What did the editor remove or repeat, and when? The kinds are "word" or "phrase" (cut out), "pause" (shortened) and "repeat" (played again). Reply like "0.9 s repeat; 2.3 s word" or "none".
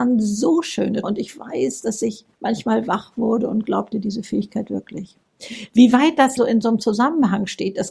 1.0 s word; 2.3 s pause; 3.9 s phrase; 6.4 s phrase